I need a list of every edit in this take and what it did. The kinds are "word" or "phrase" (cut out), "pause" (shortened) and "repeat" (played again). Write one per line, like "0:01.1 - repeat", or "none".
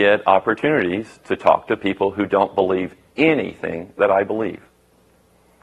none